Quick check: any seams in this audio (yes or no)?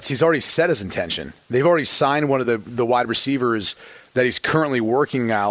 no